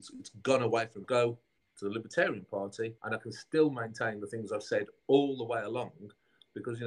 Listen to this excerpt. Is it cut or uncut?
cut